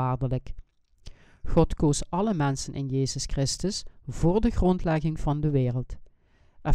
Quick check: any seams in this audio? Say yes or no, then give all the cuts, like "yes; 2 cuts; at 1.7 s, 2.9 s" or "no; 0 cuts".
no; 0 cuts